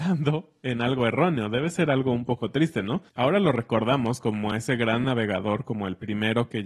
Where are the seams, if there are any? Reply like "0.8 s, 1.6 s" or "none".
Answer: none